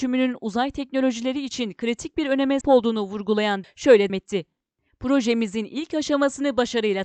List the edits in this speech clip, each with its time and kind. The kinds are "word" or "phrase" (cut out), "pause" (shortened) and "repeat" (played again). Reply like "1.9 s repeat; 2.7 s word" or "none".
2.6 s word; 3.6 s word; 4.1 s word